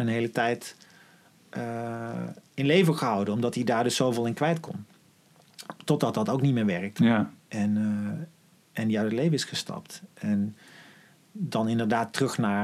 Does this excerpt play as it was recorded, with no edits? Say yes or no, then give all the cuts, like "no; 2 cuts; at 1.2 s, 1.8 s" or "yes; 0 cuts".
yes; 0 cuts